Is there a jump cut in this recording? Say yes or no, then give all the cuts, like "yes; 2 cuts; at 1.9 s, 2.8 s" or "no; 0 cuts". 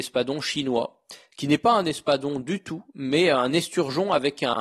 no; 0 cuts